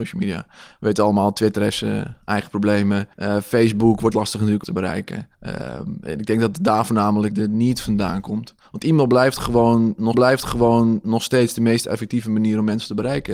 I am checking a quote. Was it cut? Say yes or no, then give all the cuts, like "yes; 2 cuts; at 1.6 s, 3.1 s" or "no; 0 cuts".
yes; 7 cuts; at 3.1 s, 4.1 s, 4.6 s, 5.3 s, 7.3 s, 8.6 s, 10.1 s